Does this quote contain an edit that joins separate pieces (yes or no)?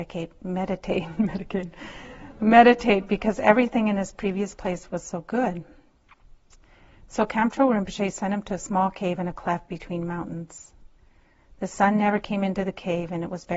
no